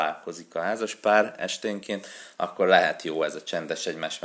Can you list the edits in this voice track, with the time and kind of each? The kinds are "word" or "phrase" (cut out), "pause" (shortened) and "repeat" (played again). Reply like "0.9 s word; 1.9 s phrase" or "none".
none